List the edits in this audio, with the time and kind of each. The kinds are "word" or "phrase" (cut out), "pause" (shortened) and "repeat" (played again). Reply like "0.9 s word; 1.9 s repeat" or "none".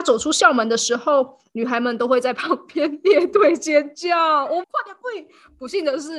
4.6 s phrase